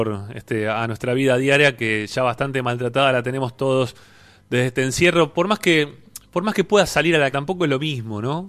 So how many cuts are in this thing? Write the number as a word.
one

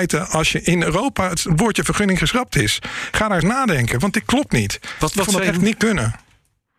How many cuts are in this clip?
one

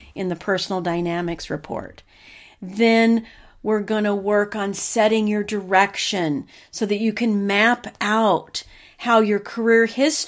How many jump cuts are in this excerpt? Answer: zero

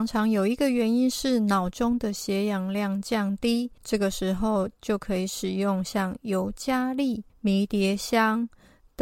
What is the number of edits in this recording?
two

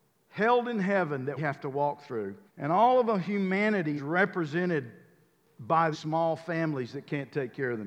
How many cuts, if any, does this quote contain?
four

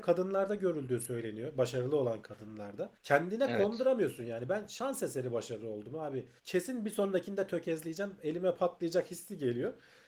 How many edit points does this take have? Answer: two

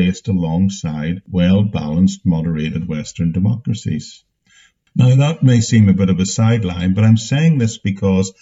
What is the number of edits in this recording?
zero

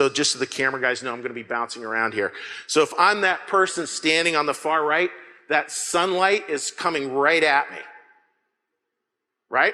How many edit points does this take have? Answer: zero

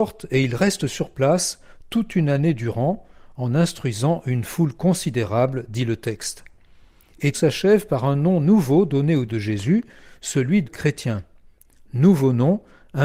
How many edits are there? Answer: three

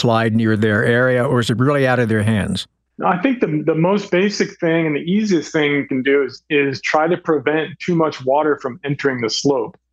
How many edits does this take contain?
one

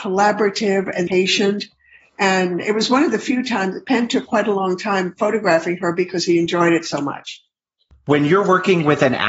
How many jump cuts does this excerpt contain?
one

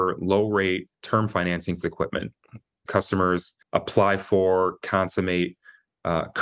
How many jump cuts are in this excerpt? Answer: four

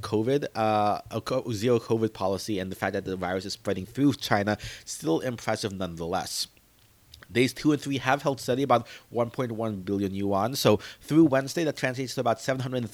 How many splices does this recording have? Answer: zero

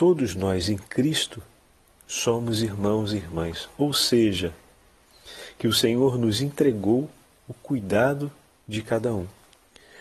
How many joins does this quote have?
zero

